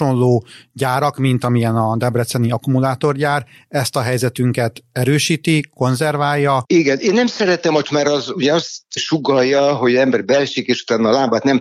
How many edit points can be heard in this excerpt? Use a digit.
1